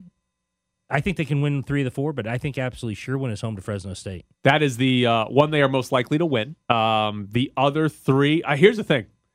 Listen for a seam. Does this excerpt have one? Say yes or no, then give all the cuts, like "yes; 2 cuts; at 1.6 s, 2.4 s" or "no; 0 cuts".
yes; 2 cuts; at 4.3 s, 6.6 s